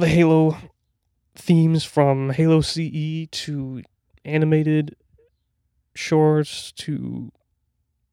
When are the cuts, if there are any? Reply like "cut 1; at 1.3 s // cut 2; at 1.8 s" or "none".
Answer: none